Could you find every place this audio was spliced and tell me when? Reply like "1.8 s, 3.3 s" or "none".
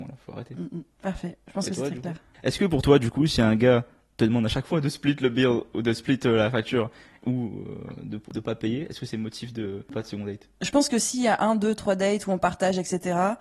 0.9 s